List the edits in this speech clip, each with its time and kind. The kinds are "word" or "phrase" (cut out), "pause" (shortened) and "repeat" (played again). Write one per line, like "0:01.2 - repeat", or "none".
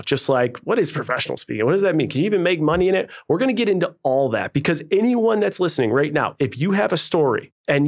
none

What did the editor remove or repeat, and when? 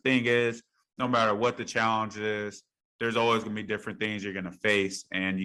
none

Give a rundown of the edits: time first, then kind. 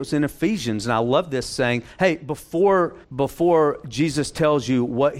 0:01.9 - pause
0:03.0 - pause

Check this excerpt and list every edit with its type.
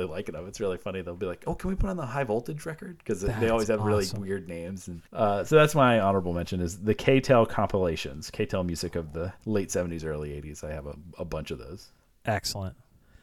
0:05.0 - pause
0:09.3 - pause

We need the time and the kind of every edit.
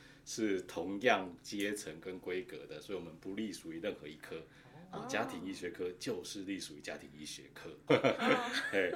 0:07.9 - word

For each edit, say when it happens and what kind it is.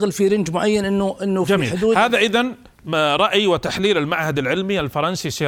none

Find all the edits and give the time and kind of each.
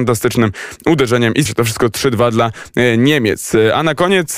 0:01.5 - word

